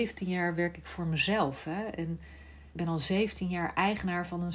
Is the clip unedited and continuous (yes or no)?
no